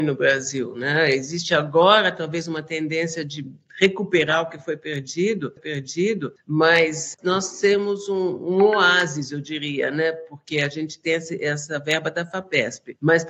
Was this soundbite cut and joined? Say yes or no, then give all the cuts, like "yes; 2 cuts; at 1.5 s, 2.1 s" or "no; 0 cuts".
yes; 1 cut; at 5.6 s